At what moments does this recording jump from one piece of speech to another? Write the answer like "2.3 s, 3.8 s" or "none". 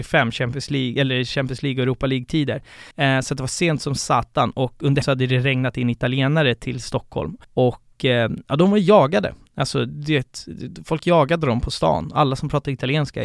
2.9 s, 5.0 s, 7.4 s